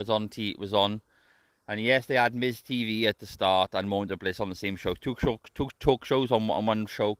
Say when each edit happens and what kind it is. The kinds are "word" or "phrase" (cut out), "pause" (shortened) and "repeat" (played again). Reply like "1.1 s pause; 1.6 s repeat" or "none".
none